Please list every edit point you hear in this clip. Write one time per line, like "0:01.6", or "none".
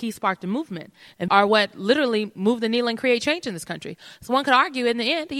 0:01.3